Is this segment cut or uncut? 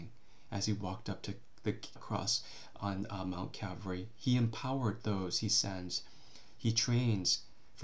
cut